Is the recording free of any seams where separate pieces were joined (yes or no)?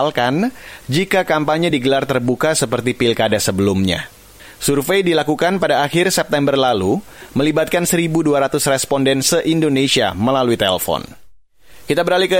yes